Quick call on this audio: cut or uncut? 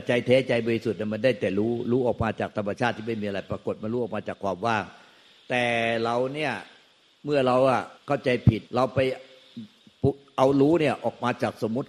cut